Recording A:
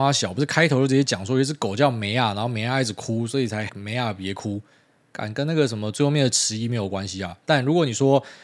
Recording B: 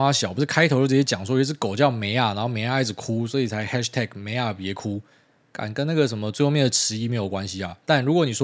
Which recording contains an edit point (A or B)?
A